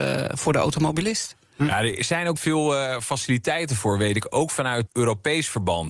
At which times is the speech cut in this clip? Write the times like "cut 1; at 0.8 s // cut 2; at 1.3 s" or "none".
cut 1; at 2.4 s // cut 2; at 4.9 s